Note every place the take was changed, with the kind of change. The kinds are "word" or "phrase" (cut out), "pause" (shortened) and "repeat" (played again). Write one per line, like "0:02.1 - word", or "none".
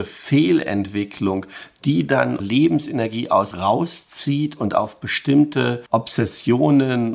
0:02.4 - word
0:03.5 - word
0:05.9 - pause